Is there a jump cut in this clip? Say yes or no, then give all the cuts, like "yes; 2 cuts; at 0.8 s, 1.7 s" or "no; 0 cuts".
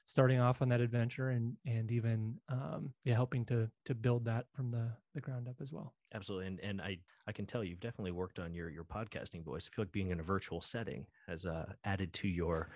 yes; 2 cuts; at 3.0 s, 7.1 s